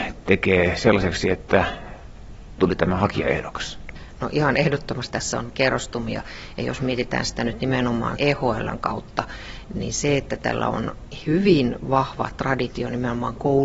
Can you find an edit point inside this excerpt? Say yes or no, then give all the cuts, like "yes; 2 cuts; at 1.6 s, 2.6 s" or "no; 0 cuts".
yes; 4 cuts; at 2.6 s, 5.1 s, 5.5 s, 8.2 s